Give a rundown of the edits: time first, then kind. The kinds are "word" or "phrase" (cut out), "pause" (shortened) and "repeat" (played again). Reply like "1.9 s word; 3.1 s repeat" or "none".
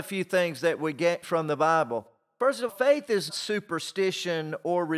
1.2 s word; 2.7 s word; 3.3 s word